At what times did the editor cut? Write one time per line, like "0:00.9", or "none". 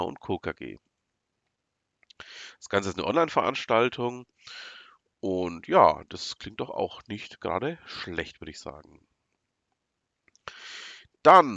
none